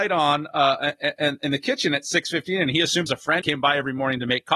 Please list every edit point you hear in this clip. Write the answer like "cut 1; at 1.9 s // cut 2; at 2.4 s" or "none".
cut 1; at 3.1 s // cut 2; at 3.4 s